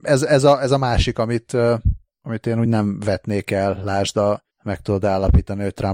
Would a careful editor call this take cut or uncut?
uncut